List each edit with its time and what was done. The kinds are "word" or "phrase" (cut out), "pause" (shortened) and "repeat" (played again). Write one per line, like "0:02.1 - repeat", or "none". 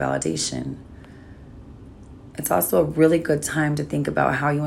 none